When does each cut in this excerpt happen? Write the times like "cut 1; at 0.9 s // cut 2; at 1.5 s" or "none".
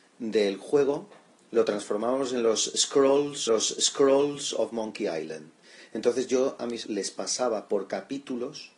cut 1; at 3.5 s // cut 2; at 6.8 s